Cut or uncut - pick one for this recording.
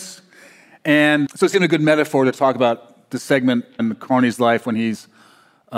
cut